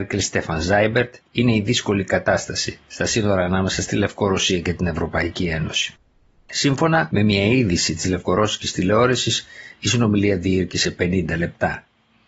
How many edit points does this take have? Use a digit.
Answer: 2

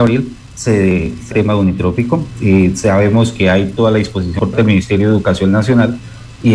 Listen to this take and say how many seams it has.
1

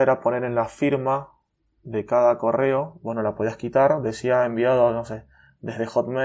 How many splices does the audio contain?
0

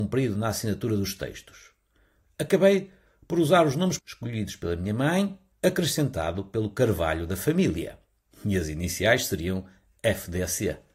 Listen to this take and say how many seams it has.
2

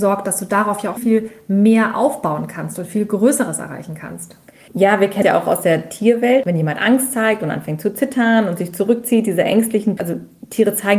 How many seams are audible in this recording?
3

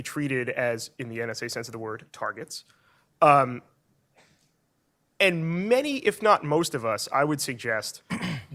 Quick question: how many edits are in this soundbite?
0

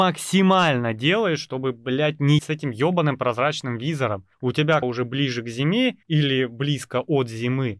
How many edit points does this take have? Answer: 4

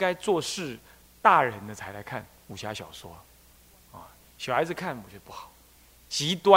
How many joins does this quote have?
0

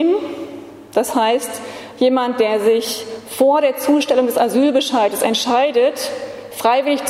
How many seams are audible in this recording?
0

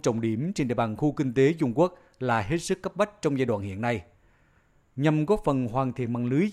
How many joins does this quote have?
0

